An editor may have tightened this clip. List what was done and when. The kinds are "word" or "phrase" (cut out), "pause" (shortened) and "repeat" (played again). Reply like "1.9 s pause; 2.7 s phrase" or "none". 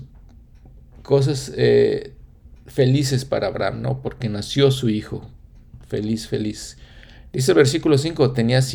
none